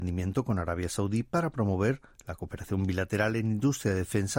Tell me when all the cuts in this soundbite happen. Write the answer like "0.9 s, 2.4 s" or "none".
none